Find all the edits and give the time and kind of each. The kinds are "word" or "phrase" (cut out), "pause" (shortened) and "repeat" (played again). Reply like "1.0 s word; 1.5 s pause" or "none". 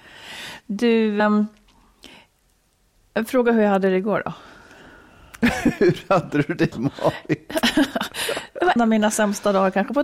1.2 s word; 6.7 s word; 8.8 s word